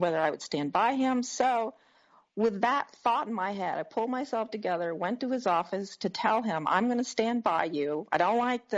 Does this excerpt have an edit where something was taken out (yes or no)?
no